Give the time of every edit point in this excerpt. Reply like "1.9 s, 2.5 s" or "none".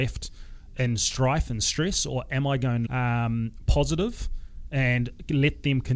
2.9 s